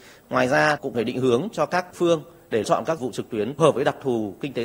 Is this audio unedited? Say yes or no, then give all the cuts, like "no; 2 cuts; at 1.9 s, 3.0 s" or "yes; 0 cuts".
no; 5 cuts; at 0.9 s, 1.9 s, 2.6 s, 3.0 s, 3.6 s